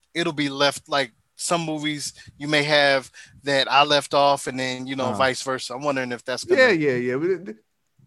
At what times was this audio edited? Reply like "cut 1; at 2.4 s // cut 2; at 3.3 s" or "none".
none